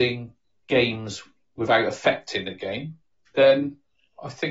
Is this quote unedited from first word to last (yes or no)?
yes